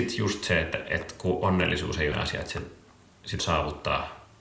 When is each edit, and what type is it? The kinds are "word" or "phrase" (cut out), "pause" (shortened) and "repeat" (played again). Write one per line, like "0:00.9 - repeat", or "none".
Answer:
0:02.1 - word
0:03.4 - word